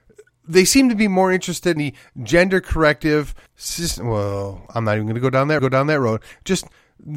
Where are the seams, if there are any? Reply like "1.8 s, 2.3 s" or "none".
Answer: 1.8 s, 3.5 s, 5.6 s